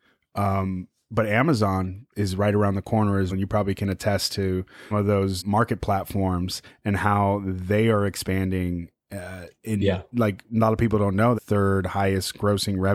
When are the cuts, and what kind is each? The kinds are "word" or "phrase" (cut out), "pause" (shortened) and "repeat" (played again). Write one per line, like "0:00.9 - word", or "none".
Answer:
0:02.1 - word
0:03.3 - word
0:04.9 - word
0:05.4 - word
0:11.3 - phrase